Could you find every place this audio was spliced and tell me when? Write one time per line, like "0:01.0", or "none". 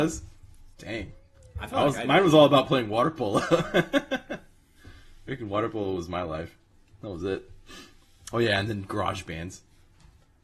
none